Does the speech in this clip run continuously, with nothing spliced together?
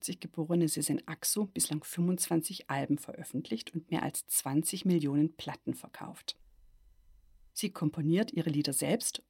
yes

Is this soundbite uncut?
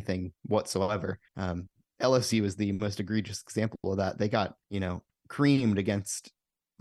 no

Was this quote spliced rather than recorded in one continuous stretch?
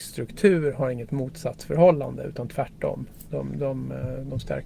no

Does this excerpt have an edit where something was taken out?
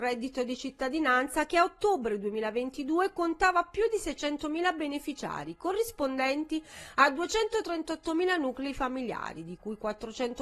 no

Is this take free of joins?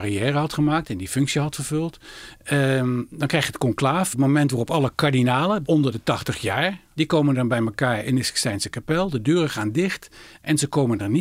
yes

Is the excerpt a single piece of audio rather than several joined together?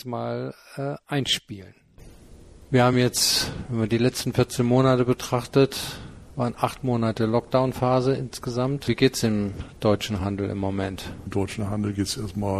yes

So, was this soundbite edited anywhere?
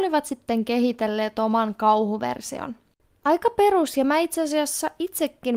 no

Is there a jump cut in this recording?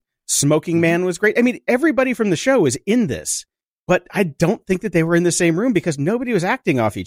no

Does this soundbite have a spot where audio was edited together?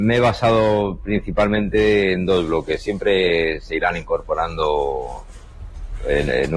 no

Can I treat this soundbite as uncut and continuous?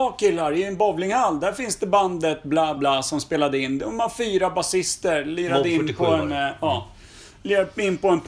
no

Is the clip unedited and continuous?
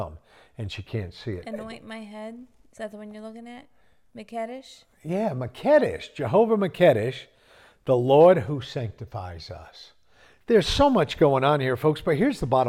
yes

